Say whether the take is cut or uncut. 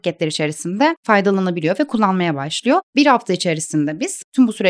uncut